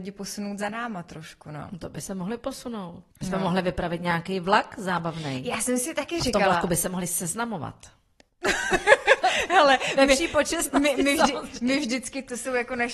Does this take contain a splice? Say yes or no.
yes